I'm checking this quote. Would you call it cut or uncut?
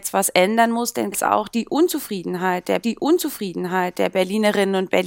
cut